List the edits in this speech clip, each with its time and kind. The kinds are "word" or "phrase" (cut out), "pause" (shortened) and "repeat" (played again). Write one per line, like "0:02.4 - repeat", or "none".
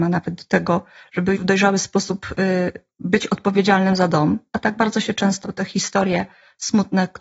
0:01.4 - word
0:05.4 - word